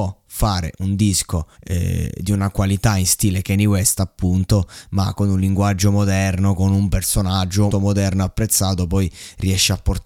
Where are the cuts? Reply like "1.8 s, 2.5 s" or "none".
1.5 s, 7.7 s